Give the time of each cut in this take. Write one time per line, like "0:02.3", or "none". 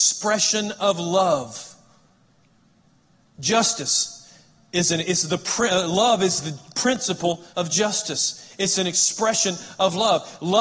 0:07.5